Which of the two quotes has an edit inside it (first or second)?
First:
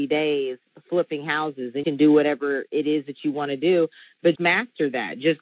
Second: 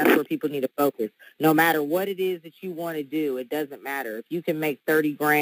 first